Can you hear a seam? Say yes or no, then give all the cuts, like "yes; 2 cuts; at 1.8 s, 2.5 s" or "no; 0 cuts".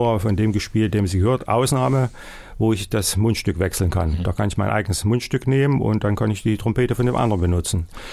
no; 0 cuts